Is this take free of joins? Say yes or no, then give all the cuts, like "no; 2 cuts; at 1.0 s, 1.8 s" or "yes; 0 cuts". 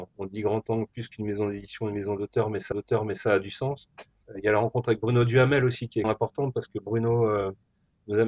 no; 3 cuts; at 2.7 s, 4.2 s, 6.0 s